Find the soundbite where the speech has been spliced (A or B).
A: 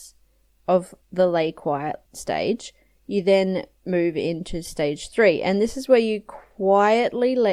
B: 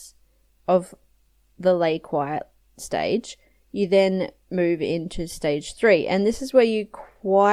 A